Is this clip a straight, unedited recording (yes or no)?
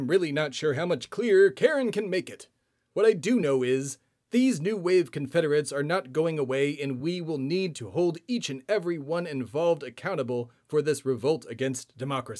yes